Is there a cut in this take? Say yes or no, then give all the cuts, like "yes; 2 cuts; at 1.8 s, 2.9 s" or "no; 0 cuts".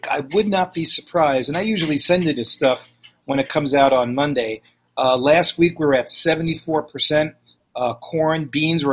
no; 0 cuts